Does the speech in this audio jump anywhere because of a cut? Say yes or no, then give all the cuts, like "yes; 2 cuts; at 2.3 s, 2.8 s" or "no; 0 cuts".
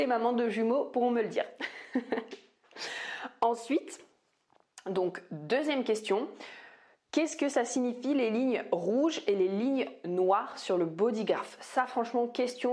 no; 0 cuts